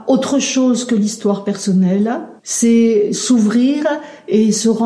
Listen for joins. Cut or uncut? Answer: cut